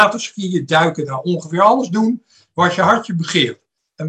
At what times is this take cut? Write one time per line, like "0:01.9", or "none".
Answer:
none